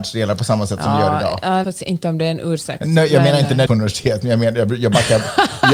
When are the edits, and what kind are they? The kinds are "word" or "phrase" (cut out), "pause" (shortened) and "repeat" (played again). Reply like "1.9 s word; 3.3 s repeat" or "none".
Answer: 1.6 s word; 3.7 s phrase